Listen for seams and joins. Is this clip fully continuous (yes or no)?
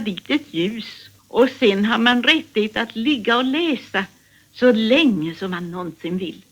no